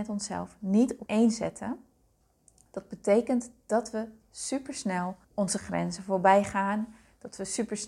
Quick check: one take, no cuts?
no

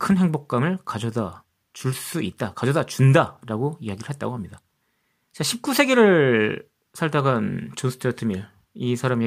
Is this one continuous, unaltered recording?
yes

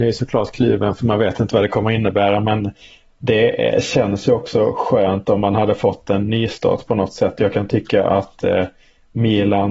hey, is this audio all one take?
yes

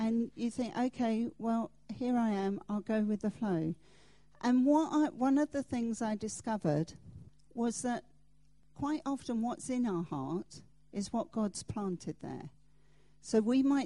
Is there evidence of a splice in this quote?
no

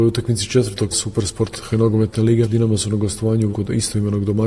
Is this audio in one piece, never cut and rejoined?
no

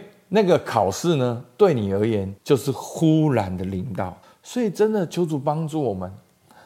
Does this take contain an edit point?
yes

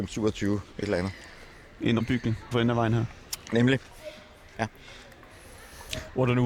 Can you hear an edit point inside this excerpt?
yes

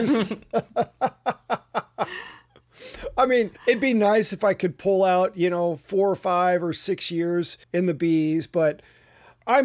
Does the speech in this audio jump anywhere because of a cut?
yes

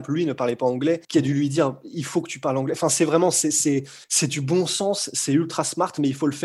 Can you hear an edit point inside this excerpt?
yes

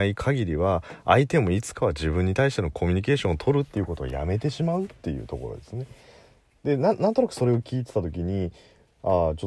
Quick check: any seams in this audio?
no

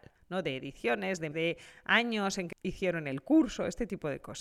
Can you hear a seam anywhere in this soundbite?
yes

